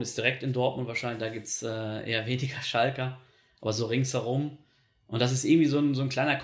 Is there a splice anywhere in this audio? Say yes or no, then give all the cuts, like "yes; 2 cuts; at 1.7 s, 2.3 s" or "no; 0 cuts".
no; 0 cuts